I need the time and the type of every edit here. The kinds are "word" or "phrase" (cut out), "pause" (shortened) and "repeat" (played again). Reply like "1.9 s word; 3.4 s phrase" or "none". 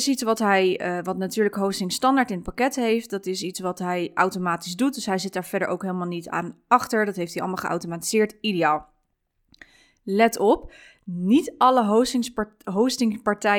none

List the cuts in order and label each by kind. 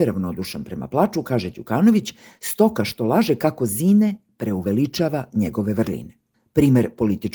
none

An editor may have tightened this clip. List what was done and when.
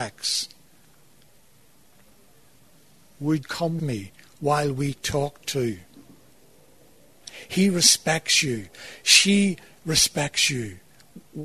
3.4 s word; 3.8 s word

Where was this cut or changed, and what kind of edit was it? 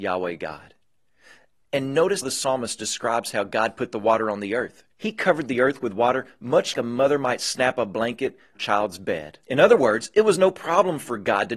2.2 s word; 4.9 s pause; 6.7 s word; 8.5 s phrase; 9.4 s pause

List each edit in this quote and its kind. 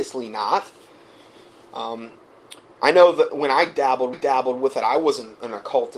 3.3 s word; 4.1 s repeat

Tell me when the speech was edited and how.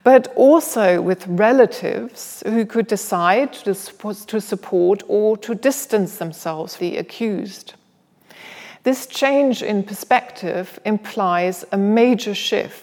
6.8 s word

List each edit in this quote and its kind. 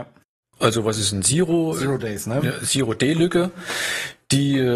none

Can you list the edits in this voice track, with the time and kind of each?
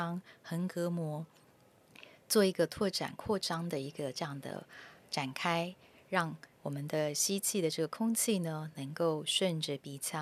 5.0 s pause; 6.5 s pause

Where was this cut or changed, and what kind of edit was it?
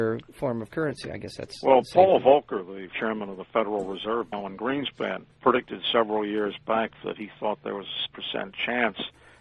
2.9 s word; 4.3 s word; 5.3 s pause; 8.1 s word

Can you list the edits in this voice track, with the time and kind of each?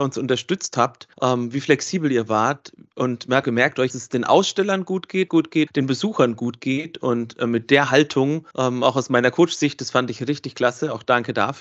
1.1 s pause; 3.4 s word; 3.9 s phrase; 5.3 s phrase; 5.7 s phrase; 8.5 s pause

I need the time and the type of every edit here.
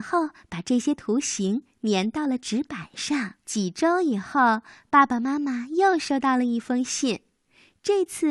3.4 s pause

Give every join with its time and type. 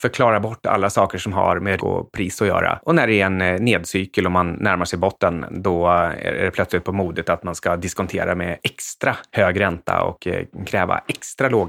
1.8 s word

